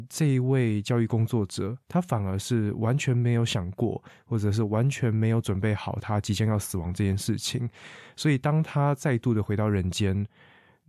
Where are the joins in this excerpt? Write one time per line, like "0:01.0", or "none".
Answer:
0:01.8